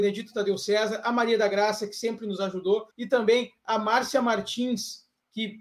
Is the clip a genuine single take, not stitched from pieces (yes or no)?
no